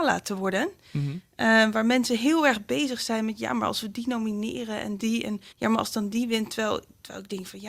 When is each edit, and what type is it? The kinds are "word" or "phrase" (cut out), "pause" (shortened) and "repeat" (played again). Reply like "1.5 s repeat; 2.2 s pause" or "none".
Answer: 5.5 s pause

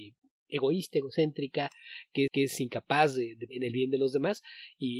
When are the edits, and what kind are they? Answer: 2.3 s repeat; 3.5 s phrase

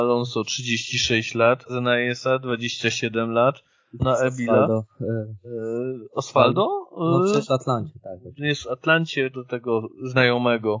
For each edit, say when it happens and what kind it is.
1.7 s word; 4.0 s word; 7.5 s word; 9.3 s word

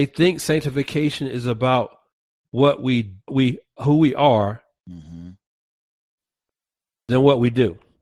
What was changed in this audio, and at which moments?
3.3 s word; 3.8 s word

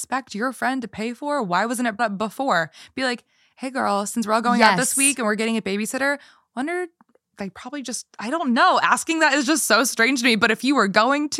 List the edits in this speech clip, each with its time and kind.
2.0 s word; 7.3 s word

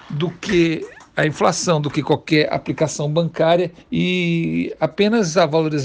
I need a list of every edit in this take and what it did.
3.8 s pause

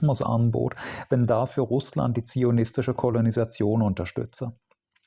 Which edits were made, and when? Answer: none

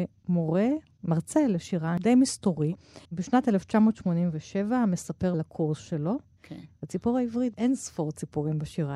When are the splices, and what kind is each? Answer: 3.0 s pause; 5.3 s word; 7.5 s phrase

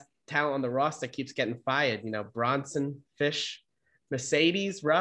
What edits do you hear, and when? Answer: none

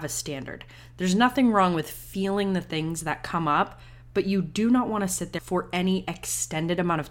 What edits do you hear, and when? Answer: 5.4 s phrase

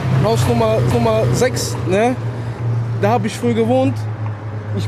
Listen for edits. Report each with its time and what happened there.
0.9 s repeat

